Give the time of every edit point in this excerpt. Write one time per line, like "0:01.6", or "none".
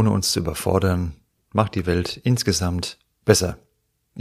none